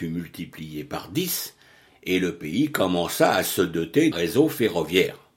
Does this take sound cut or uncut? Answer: cut